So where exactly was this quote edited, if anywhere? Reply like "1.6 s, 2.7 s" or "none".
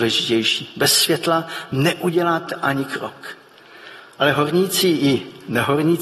none